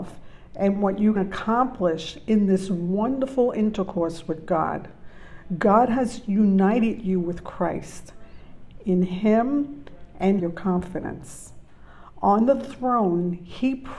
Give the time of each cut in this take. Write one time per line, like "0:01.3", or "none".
0:01.2
0:10.4